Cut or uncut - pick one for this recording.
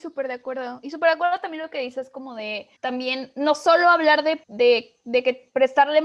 cut